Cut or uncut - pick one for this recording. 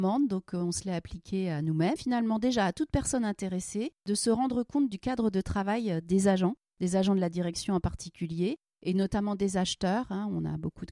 cut